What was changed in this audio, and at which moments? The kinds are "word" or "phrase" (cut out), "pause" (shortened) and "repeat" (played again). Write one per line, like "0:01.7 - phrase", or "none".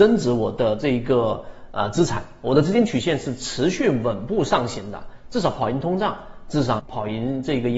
0:06.8 - word